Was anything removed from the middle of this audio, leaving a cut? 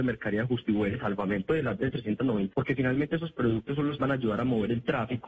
yes; 4 cuts; at 0.9 s, 1.8 s, 2.5 s, 4.0 s

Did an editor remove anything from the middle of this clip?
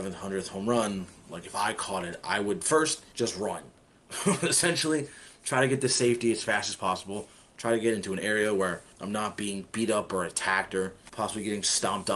no; 0 cuts

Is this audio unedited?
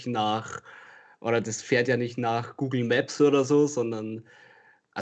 yes; 0 cuts

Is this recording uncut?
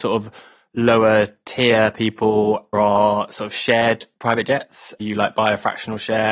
no; 2 cuts; at 2.7 s, 5.0 s

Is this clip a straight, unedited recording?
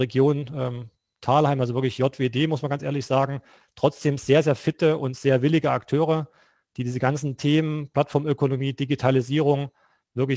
yes; 0 cuts

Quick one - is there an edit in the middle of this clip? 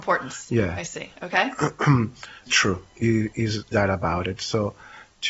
yes; 3 cuts; at 2.5 s, 2.9 s, 3.7 s

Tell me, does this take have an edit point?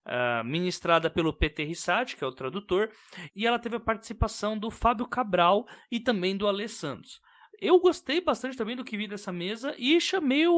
no; 0 cuts

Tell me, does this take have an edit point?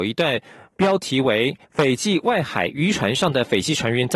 yes; 1 cut; at 1.6 s

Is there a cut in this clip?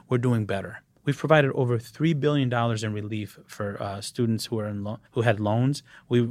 yes; 1 cut; at 5.1 s

